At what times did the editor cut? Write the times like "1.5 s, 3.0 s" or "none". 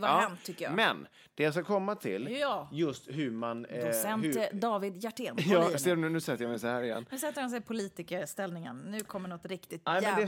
none